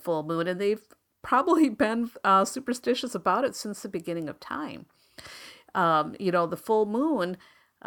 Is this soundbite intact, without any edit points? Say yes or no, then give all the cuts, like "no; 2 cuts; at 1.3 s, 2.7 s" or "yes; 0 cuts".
yes; 0 cuts